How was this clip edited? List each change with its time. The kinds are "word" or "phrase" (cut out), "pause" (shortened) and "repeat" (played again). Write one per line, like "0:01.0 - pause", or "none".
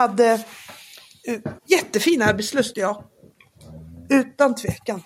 0:01.6 - pause
0:02.7 - word